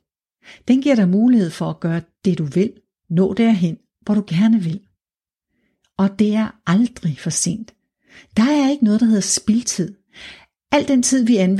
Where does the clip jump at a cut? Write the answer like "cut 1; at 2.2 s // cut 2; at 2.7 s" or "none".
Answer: none

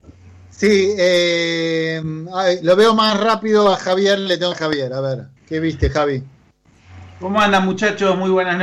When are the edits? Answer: cut 1; at 4.5 s // cut 2; at 5.4 s // cut 3; at 7.1 s

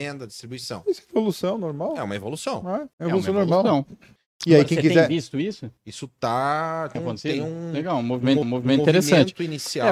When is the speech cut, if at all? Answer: cut 1; at 2.9 s // cut 2; at 4.2 s // cut 3; at 5.8 s // cut 4; at 7.0 s // cut 5; at 8.4 s

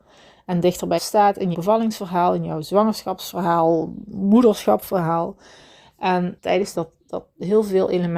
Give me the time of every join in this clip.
cut 1; at 1.0 s // cut 2; at 1.5 s // cut 3; at 6.4 s // cut 4; at 6.7 s

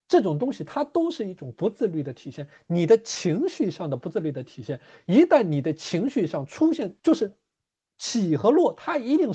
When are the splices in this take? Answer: cut 1; at 7.0 s

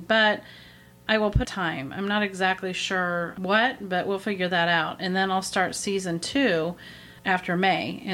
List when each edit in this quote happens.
cut 1; at 1.4 s // cut 2; at 7.2 s

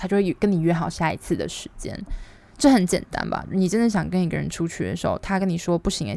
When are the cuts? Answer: none

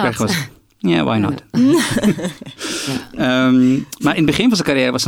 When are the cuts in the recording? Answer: none

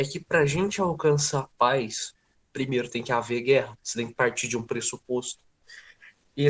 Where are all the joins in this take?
none

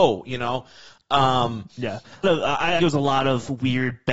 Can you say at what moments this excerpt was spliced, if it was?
cut 1; at 2.2 s // cut 2; at 2.8 s

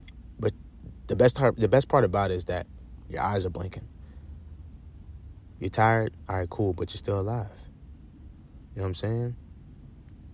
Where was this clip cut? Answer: cut 1; at 8.7 s

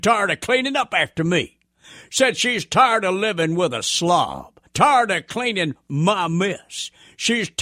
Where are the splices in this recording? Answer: cut 1; at 4.7 s

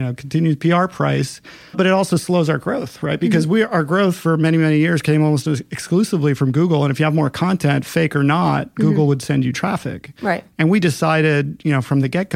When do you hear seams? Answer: cut 1; at 1.7 s

